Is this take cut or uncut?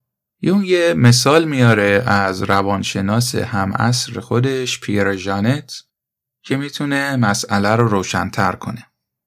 uncut